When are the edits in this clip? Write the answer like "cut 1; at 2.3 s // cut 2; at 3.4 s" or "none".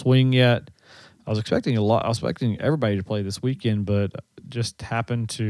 none